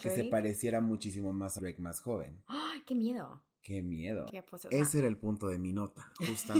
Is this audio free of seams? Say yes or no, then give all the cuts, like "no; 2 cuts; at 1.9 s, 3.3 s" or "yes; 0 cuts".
no; 2 cuts; at 1.6 s, 4.3 s